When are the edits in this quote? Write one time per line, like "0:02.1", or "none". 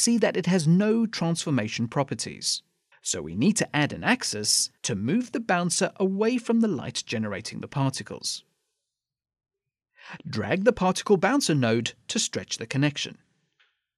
0:02.9
0:04.8

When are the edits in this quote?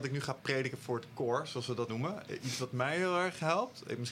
0:01.9

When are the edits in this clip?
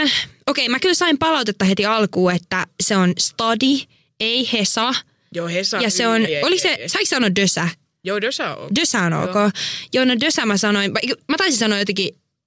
0:06.3

